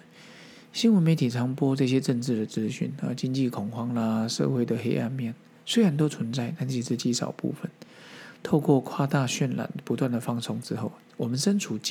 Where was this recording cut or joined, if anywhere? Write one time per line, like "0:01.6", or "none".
none